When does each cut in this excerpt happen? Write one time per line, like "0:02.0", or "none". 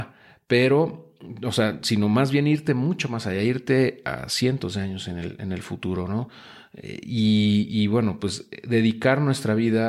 none